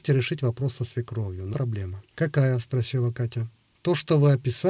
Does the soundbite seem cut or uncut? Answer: cut